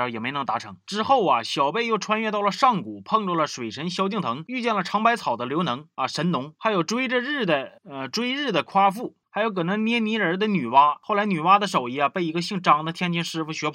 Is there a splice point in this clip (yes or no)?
yes